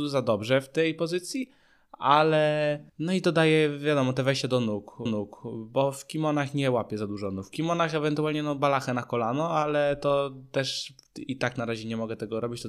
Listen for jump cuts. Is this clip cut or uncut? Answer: cut